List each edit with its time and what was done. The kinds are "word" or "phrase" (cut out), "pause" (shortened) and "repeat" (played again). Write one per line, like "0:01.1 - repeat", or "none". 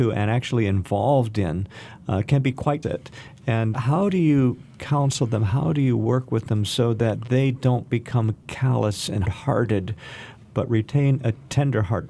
0:02.8 - phrase
0:03.7 - word
0:09.2 - word

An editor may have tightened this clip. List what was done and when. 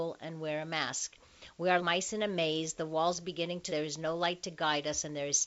0:01.8 - word
0:03.7 - word

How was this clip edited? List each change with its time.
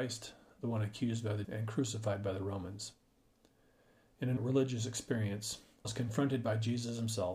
0:01.4 - word
0:04.4 - word
0:05.8 - word

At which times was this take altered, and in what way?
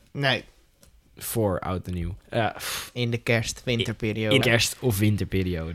0:02.2 - pause
0:02.9 - word
0:04.4 - word

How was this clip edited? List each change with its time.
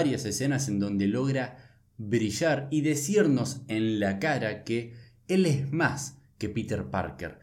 none

